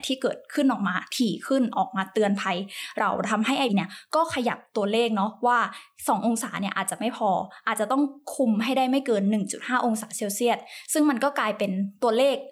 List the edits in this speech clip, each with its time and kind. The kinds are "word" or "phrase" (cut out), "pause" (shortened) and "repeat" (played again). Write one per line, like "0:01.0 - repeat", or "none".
0:03.7 - word